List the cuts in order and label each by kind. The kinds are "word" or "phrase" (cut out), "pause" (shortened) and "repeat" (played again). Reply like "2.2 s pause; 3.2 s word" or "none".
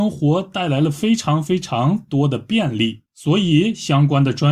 3.1 s pause